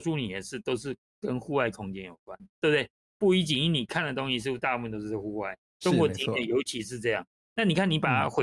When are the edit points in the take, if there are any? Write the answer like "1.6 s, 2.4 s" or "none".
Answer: 2.5 s, 5.7 s

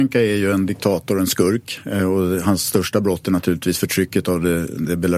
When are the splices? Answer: none

